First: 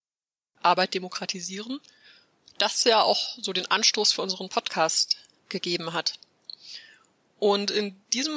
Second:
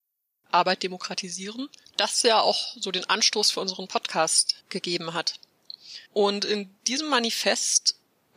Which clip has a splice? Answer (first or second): second